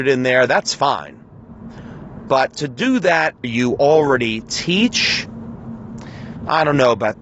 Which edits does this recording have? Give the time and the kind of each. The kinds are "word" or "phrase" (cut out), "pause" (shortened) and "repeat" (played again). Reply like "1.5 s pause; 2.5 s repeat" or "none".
3.4 s phrase

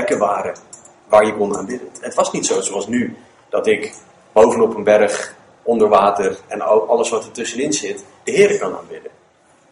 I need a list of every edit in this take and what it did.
none

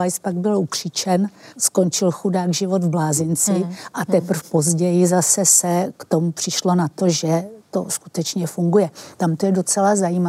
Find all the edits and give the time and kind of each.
1.5 s pause

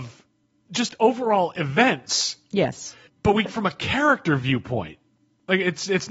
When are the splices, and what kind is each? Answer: 3.1 s pause; 3.5 s word

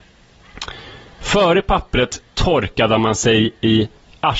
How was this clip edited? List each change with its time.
none

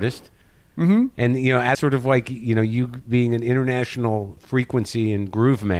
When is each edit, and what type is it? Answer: 1.7 s word; 4.4 s word

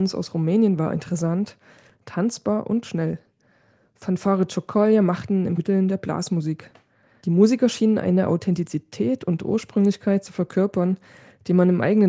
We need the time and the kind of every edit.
5.6 s phrase

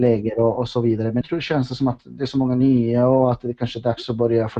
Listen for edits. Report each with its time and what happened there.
1.2 s word

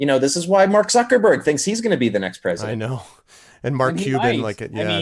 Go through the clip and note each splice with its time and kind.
none

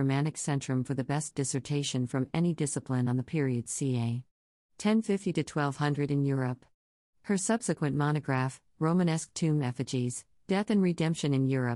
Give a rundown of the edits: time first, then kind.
none

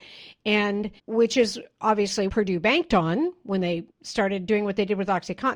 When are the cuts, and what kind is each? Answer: 1.0 s pause; 2.3 s word; 3.9 s pause

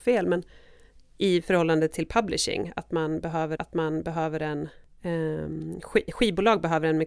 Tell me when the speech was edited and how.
3.6 s repeat

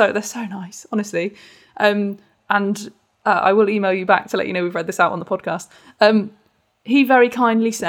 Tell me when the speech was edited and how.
none

